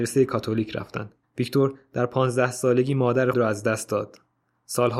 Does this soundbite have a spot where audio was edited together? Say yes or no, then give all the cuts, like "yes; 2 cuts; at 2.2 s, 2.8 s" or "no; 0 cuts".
yes; 2 cuts; at 1.2 s, 3.3 s